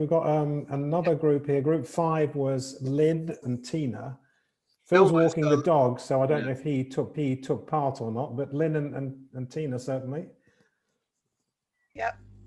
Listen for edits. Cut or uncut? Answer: cut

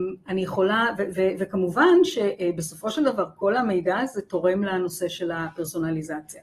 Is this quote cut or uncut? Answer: uncut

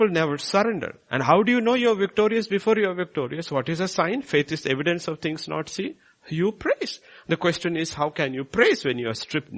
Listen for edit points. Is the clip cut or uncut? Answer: uncut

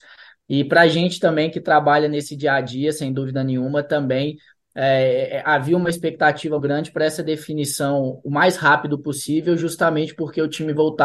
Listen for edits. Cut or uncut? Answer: cut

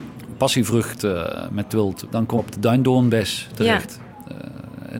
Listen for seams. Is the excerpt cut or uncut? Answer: cut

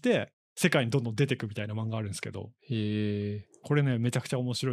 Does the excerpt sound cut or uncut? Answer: cut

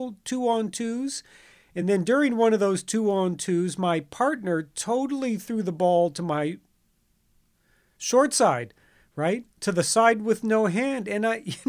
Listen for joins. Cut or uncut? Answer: uncut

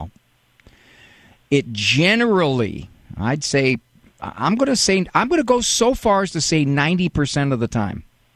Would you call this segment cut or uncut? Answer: uncut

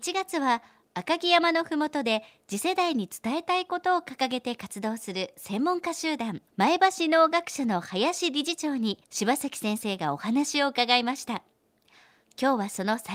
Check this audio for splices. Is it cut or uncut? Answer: cut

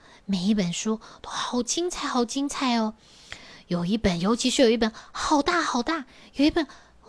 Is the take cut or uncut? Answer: uncut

